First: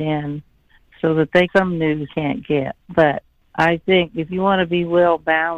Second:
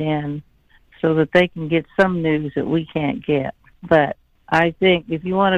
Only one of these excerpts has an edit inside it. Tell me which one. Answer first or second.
first